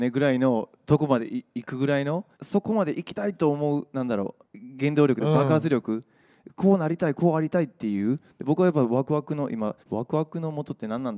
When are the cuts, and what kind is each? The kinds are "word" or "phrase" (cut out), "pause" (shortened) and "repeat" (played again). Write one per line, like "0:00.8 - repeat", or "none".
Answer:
0:02.3 - pause
0:04.4 - pause
0:09.8 - pause